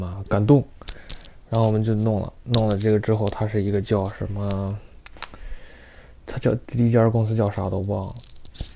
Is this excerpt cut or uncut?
uncut